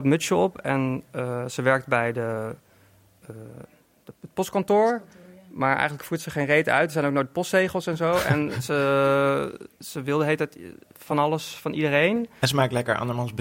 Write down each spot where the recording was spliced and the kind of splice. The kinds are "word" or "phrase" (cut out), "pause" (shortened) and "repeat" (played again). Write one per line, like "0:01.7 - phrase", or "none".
none